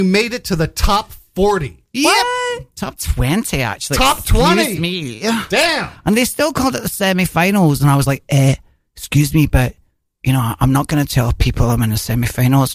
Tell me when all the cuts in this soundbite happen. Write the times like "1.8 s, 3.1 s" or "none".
none